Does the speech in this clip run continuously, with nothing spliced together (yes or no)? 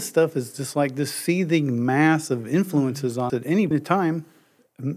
no